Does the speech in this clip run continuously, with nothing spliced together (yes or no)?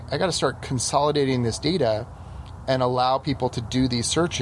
yes